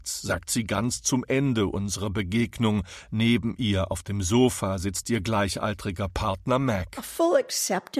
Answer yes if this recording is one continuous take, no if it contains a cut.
yes